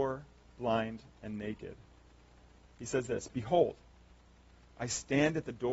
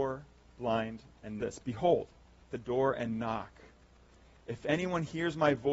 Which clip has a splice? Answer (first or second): second